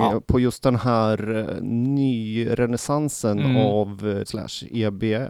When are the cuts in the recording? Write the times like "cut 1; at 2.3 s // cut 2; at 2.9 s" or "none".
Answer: cut 1; at 4.3 s